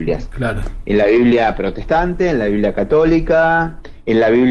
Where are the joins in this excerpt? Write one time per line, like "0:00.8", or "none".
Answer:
none